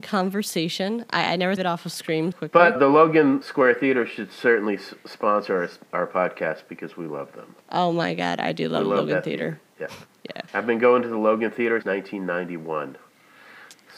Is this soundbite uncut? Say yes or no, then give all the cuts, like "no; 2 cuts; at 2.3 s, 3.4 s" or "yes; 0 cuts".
no; 7 cuts; at 1.6 s, 2.3 s, 2.8 s, 3.4 s, 7.6 s, 10.5 s, 11.8 s